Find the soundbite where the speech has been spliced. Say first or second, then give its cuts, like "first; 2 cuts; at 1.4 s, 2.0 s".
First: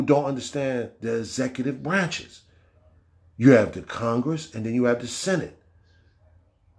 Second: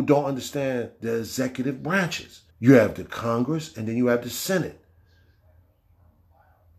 second; 1 cut; at 2.5 s